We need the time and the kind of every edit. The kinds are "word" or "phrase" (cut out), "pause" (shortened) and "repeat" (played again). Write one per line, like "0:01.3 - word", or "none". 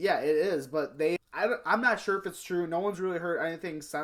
0:01.2 - word